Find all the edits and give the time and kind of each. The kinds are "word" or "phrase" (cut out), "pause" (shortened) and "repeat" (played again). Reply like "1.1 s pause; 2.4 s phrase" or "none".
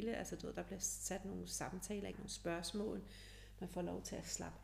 2.1 s word